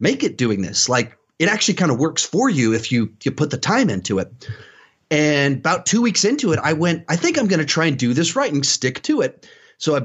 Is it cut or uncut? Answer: uncut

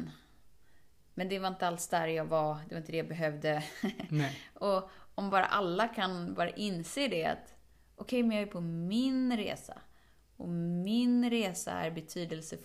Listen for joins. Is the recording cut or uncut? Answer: uncut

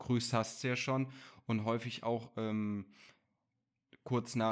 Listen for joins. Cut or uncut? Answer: uncut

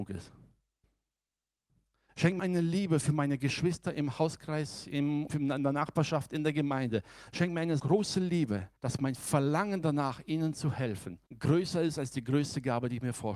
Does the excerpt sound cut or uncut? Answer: cut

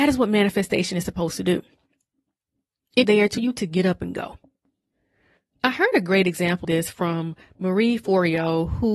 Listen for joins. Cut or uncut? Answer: cut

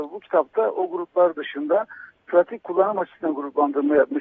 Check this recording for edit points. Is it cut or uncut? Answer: uncut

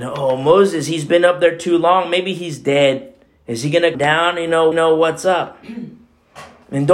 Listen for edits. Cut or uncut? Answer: cut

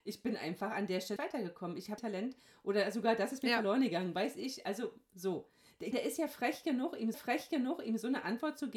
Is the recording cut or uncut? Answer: cut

